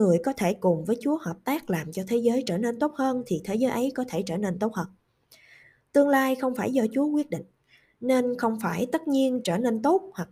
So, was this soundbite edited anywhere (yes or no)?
no